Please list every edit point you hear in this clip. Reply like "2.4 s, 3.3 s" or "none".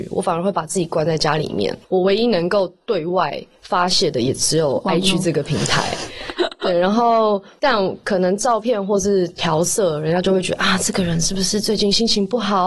none